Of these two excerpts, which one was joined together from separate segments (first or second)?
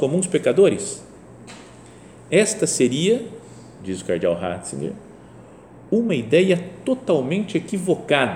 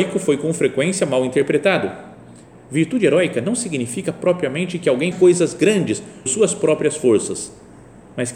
second